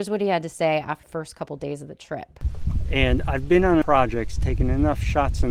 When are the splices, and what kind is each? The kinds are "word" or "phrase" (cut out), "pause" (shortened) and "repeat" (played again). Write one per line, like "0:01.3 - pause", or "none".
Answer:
0:01.0 - word
0:03.8 - word